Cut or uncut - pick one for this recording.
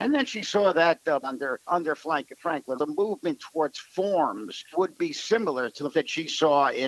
cut